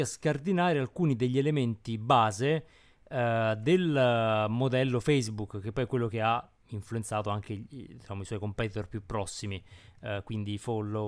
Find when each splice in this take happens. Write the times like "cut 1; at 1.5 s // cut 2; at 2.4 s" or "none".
none

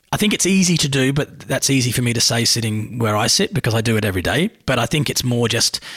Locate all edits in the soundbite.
none

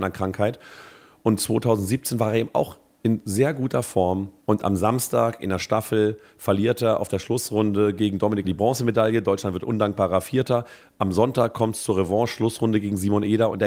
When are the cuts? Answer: cut 1; at 8.4 s

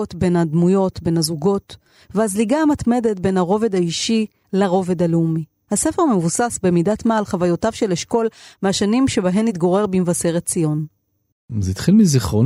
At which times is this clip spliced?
none

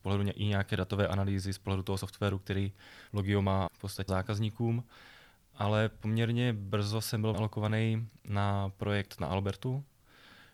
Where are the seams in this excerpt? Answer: cut 1; at 3.1 s // cut 2; at 3.7 s // cut 3; at 4.1 s // cut 4; at 7.3 s

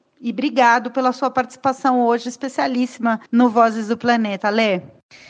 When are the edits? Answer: cut 1; at 3.3 s

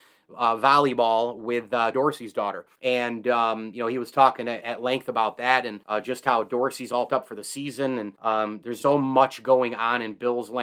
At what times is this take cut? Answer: cut 1; at 1.9 s // cut 2; at 2.7 s // cut 3; at 4.6 s // cut 4; at 5.8 s // cut 5; at 7.1 s // cut 6; at 8.1 s // cut 7; at 8.8 s

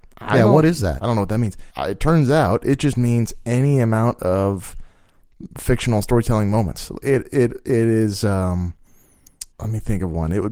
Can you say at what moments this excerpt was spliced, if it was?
cut 1; at 1.7 s // cut 2; at 9.5 s

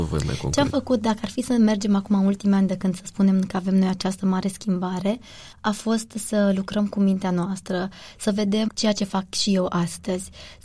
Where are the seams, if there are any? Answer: cut 1; at 5.5 s // cut 2; at 8.7 s

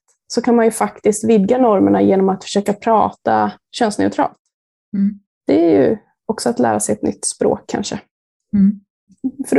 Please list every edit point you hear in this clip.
none

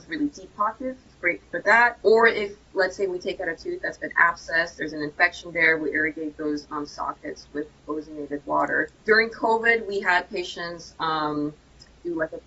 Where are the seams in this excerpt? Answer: cut 1; at 2.0 s // cut 2; at 8.9 s

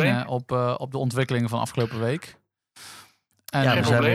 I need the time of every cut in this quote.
none

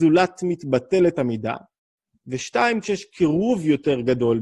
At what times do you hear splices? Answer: cut 1; at 2.8 s

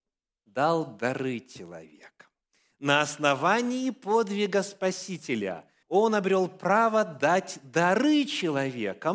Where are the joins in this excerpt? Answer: cut 1; at 5.8 s

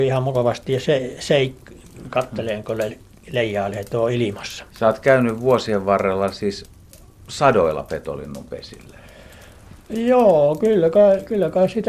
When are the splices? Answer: cut 1; at 4.7 s

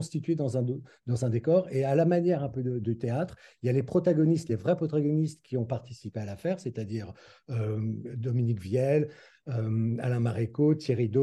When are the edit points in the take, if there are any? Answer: none

